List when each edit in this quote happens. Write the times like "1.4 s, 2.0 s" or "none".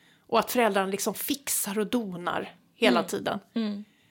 none